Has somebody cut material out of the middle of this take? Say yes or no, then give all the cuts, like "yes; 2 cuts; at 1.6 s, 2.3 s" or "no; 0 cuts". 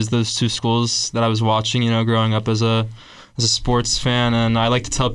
no; 0 cuts